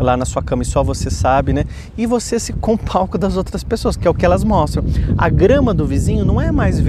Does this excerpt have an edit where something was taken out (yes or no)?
yes